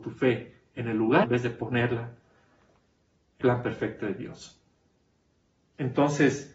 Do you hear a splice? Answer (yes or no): yes